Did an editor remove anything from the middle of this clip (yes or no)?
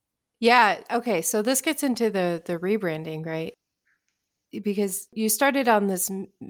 no